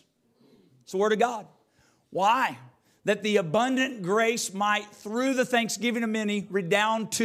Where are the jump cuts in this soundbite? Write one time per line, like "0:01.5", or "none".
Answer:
none